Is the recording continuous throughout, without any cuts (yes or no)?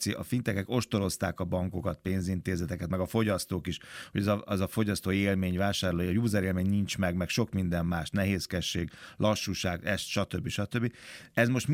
yes